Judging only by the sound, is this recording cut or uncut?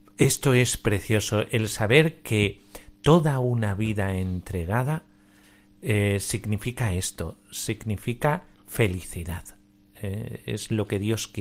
uncut